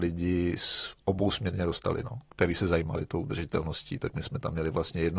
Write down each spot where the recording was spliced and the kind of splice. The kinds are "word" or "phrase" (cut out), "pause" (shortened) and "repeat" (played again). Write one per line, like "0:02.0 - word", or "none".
0:02.3 - pause

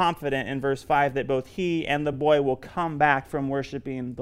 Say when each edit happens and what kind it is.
none

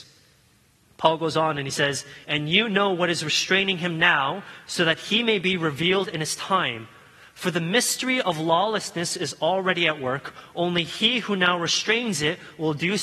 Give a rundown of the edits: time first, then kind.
none

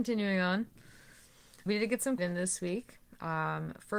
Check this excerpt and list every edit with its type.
0:01.7 - word
0:02.2 - phrase

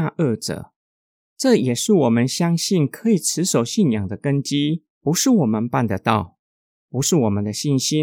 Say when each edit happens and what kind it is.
0:04.9 - pause

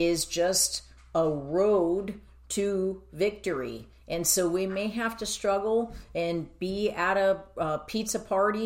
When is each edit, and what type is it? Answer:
none

